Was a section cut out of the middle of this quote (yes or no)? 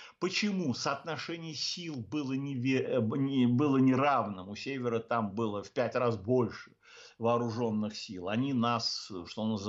no